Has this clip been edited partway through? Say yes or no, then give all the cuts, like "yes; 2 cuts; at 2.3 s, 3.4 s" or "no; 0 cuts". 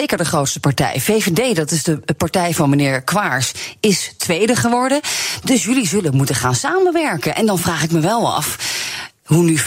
no; 0 cuts